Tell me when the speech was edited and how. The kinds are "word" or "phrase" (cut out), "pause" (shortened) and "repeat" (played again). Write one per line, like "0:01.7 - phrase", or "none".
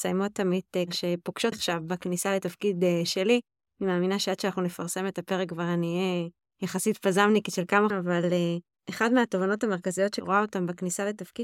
0:01.5 - word
0:07.9 - word